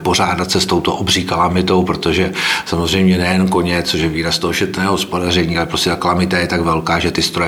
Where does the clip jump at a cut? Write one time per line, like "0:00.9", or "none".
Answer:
none